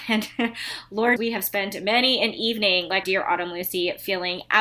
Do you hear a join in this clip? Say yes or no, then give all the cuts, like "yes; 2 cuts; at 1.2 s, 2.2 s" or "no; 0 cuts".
yes; 2 cuts; at 1.2 s, 3.0 s